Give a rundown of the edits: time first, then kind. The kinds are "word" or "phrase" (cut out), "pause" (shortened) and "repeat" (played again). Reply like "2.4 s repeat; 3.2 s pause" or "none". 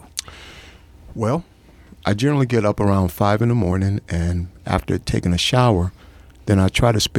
none

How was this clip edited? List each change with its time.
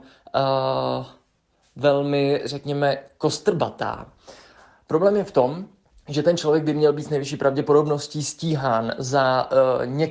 5.8 s pause

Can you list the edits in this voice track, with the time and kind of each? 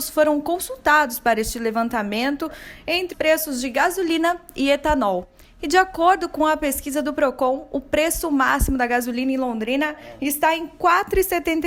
3.1 s word

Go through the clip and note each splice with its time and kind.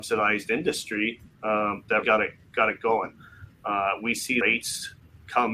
2.0 s word; 4.4 s word

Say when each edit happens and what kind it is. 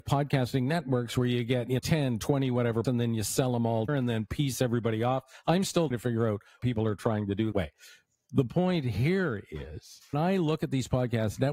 1.8 s word; 2.8 s word; 3.9 s word; 5.9 s word; 6.6 s word; 7.5 s word; 10.1 s word

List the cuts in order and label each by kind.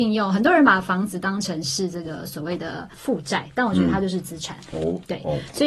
2.9 s pause

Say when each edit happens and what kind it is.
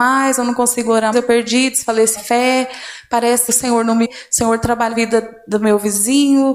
1.1 s word; 2.2 s word; 3.5 s word; 4.0 s word; 4.9 s word

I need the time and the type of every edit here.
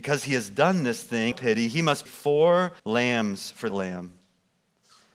1.3 s phrase; 2.1 s word; 2.8 s pause; 3.7 s word

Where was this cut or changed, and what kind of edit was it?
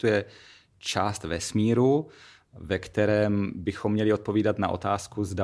none

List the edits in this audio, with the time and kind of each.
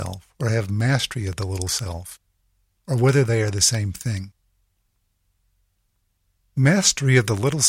none

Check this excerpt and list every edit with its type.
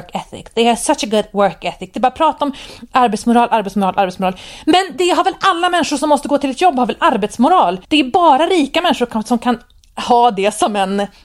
7.8 s pause

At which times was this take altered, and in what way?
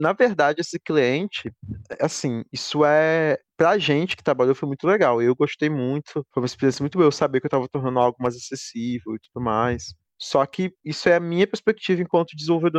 10.7 s pause

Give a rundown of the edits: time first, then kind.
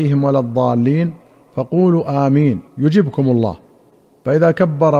2.7 s pause

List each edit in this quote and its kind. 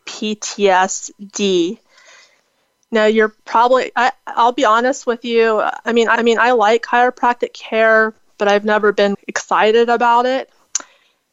3.4 s pause; 6.2 s repeat; 9.1 s word

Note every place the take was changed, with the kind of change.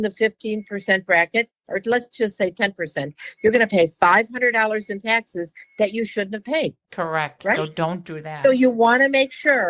6.8 s pause

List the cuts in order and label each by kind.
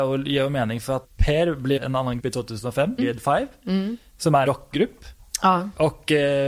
1.0 s word; 1.8 s phrase; 2.2 s word; 3.0 s word; 4.5 s word

